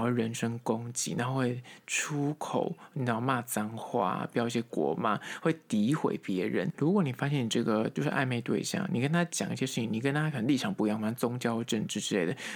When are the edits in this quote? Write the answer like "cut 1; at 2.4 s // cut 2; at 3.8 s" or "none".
cut 1; at 6.7 s